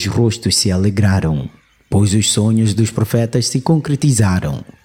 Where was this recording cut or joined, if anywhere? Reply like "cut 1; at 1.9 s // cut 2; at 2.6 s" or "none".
none